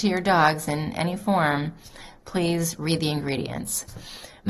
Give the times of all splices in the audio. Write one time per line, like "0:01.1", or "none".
none

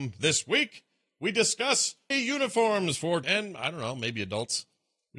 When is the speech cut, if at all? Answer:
0:02.1
0:03.2

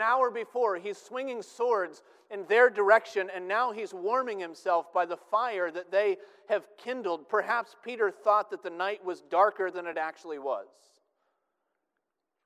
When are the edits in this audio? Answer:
none

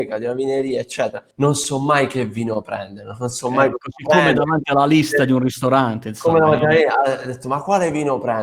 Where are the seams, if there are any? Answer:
0:01.3

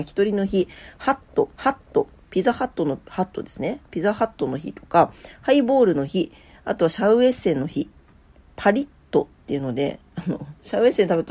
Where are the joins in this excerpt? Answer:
0:01.5

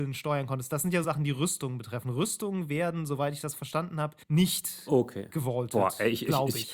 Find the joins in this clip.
0:01.0
0:04.2

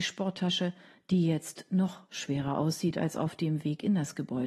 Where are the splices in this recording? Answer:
none

